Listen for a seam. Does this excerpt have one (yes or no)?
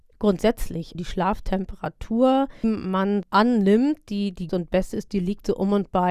yes